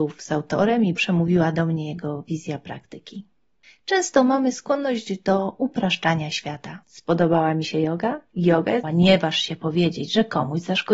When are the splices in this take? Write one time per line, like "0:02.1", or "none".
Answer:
0:01.0
0:06.8
0:08.8